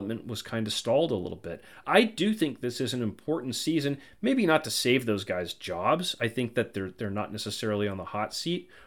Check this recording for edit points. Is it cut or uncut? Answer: uncut